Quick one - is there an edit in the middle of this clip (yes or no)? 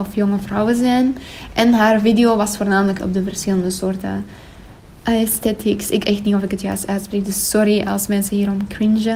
yes